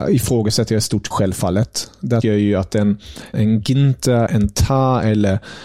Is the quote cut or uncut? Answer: cut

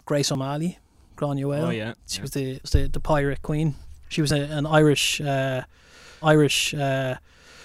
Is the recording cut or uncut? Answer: cut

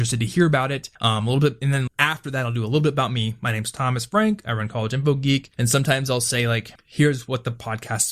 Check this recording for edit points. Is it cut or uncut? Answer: cut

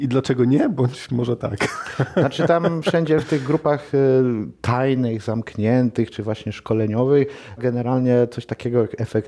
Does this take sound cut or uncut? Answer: cut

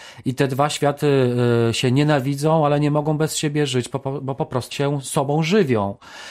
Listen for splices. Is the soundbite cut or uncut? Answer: cut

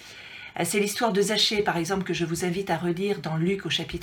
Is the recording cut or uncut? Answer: uncut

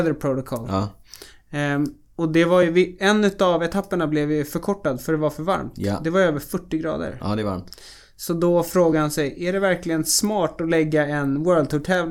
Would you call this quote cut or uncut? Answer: uncut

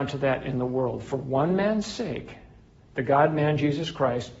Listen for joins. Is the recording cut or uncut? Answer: uncut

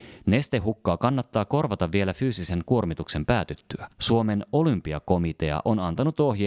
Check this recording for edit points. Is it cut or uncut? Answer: cut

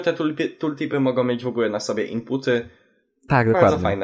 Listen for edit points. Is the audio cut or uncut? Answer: uncut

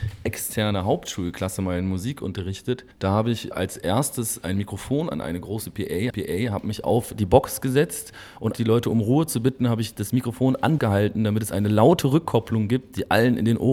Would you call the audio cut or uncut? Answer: cut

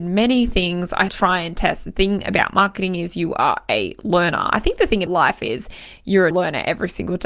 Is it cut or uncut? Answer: cut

